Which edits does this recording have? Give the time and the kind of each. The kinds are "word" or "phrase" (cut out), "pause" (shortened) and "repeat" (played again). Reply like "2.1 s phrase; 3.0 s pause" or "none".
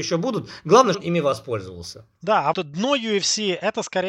0.9 s word; 2.5 s word